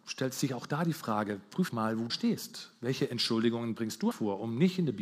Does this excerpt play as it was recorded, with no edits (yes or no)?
no